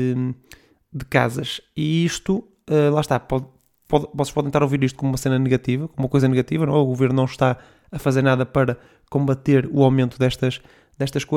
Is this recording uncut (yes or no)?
yes